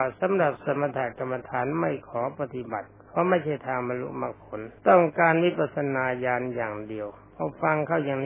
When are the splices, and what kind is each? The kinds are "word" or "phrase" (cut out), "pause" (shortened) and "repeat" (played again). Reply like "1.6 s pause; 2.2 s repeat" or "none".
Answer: 4.8 s pause